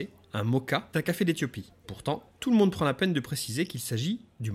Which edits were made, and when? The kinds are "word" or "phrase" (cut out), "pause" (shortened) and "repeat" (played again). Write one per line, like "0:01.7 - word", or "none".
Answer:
0:00.9 - word